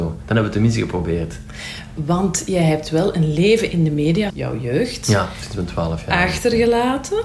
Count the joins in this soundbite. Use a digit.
1